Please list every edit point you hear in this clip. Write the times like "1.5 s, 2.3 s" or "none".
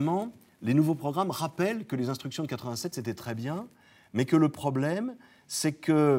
none